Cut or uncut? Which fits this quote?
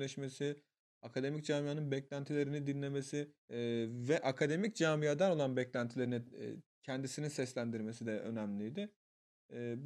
cut